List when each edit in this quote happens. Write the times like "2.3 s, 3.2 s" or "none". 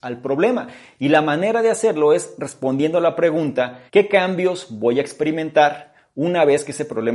3.9 s

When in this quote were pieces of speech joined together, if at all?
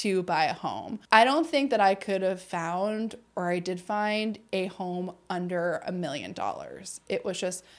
1.0 s

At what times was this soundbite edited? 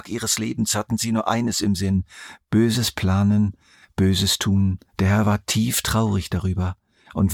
4.9 s

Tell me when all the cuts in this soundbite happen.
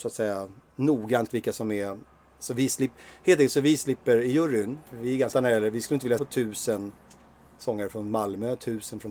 1.3 s, 4.9 s, 5.3 s, 6.2 s

